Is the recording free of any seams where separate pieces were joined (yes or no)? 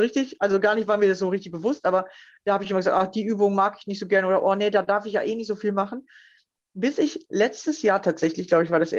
yes